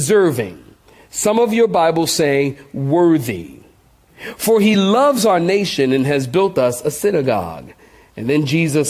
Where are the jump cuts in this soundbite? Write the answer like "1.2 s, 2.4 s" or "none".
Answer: none